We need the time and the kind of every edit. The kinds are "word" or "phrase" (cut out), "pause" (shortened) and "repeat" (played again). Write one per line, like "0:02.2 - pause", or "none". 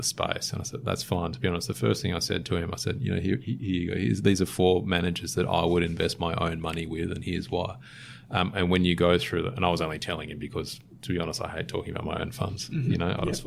none